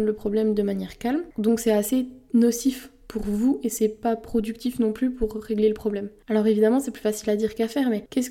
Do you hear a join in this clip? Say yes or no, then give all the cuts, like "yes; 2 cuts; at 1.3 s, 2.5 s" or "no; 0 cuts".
no; 0 cuts